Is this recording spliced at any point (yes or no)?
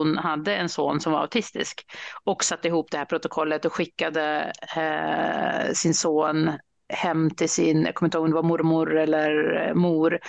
no